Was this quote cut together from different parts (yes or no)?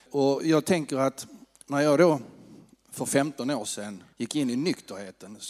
yes